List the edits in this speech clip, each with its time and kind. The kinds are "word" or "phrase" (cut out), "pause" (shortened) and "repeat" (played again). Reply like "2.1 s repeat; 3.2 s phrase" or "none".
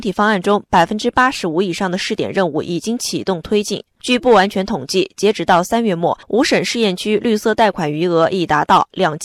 6.2 s pause